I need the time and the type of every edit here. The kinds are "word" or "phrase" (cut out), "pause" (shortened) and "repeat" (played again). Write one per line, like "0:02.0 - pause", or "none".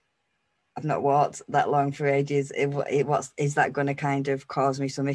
none